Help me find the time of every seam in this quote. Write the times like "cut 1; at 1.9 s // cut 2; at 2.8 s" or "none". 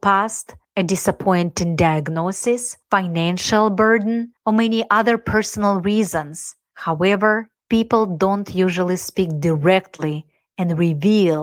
cut 1; at 4.4 s